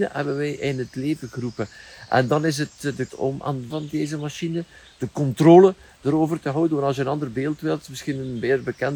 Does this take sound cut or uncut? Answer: cut